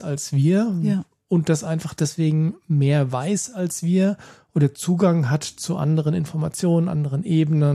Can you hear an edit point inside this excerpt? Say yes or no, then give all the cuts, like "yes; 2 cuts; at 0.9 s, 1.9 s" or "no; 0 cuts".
no; 0 cuts